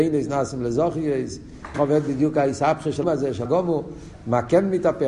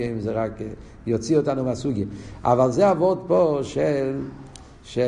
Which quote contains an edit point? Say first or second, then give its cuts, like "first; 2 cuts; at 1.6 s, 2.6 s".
first; 3 cuts; at 1.7 s, 3.0 s, 3.5 s